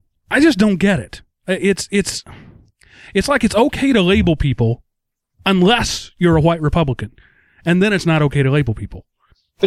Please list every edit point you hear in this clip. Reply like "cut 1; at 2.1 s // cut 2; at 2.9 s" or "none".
none